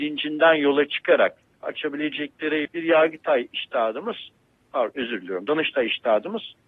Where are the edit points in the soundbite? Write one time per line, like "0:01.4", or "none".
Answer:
0:01.6
0:02.6